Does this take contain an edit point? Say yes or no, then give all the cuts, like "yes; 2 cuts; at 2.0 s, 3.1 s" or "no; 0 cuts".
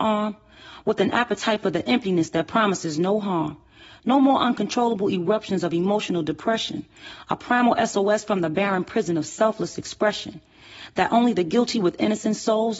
no; 0 cuts